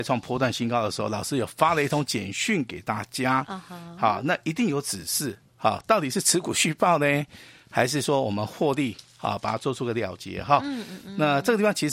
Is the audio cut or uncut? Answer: uncut